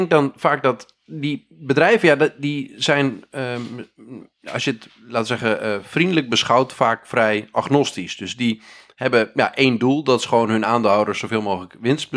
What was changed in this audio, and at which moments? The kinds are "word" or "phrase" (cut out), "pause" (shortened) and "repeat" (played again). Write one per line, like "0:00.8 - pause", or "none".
none